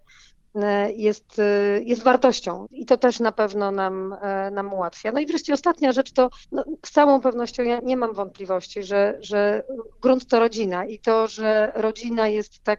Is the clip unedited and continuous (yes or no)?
no